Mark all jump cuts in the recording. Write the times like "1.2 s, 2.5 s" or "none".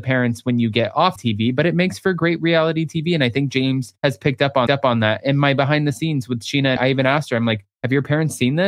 1.2 s, 4.0 s, 4.7 s, 6.8 s, 7.7 s